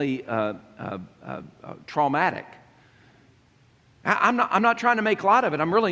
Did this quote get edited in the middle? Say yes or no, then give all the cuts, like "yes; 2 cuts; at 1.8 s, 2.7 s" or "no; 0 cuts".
no; 0 cuts